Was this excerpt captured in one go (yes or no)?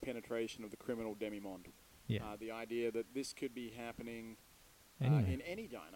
yes